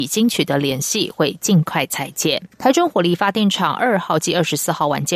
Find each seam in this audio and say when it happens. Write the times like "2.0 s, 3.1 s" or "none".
2.5 s